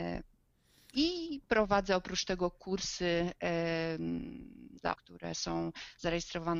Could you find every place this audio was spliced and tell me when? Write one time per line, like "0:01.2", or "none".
0:05.0